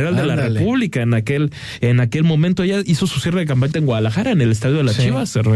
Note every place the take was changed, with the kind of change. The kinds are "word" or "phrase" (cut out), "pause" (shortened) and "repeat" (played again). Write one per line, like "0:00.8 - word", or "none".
0:03.7 - word